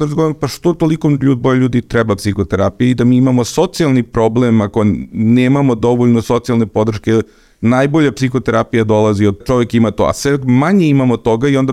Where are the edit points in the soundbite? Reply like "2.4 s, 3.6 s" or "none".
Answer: 9.4 s